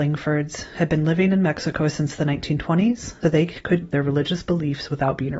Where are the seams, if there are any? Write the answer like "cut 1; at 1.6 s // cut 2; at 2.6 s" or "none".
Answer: cut 1; at 3.2 s // cut 2; at 3.8 s